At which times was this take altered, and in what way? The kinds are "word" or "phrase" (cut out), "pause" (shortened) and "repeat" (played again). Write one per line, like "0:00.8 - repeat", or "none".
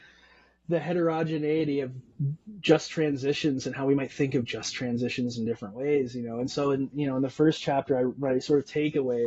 none